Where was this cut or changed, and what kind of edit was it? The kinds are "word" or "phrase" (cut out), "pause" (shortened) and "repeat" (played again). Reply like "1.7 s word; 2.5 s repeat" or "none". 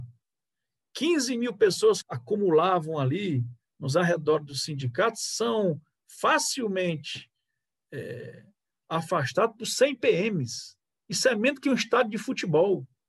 2.0 s phrase